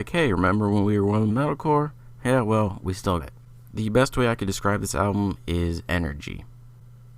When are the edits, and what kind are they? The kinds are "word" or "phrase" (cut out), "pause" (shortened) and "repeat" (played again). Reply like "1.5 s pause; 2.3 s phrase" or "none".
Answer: 1.3 s phrase; 3.2 s word